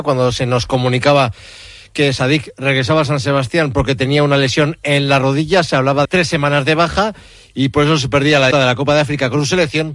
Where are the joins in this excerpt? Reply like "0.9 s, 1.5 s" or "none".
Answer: 6.0 s, 8.5 s